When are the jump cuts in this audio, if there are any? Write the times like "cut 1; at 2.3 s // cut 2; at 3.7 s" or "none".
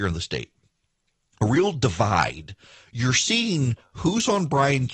none